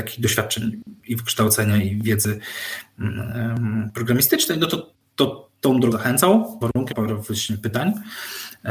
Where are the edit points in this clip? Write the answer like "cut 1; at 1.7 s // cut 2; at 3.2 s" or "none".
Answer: cut 1; at 1.0 s // cut 2; at 5.0 s // cut 3; at 5.9 s // cut 4; at 6.6 s // cut 5; at 6.9 s